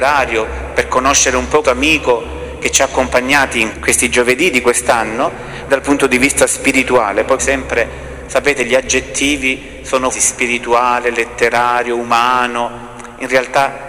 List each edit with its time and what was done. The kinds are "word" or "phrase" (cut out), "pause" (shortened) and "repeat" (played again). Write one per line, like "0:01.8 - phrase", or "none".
0:01.6 - word
0:03.7 - word
0:05.7 - word
0:07.4 - word
0:10.1 - word